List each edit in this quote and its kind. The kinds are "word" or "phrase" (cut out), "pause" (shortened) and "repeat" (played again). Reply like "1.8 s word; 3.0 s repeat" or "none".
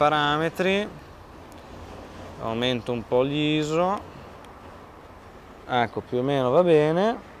none